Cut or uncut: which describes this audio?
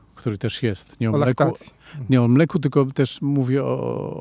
uncut